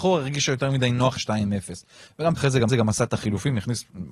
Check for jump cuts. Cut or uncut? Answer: cut